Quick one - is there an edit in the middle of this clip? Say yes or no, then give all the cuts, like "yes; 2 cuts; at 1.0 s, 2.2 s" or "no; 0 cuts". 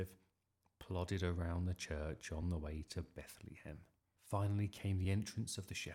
no; 0 cuts